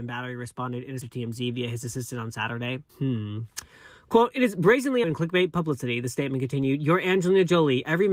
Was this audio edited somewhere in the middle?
yes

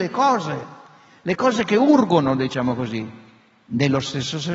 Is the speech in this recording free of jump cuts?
yes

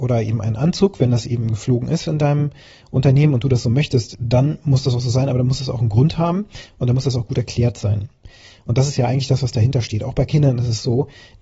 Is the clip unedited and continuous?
yes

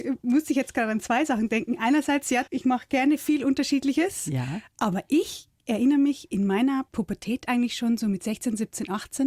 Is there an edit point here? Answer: yes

